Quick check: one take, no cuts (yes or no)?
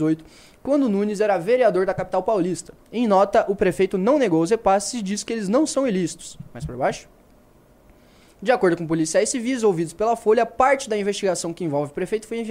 yes